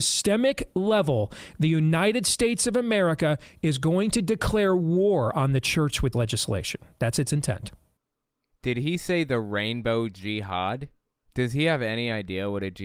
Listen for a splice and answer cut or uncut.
cut